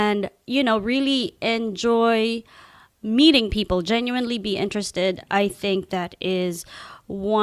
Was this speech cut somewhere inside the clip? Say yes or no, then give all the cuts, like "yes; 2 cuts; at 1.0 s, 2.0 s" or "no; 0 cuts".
no; 0 cuts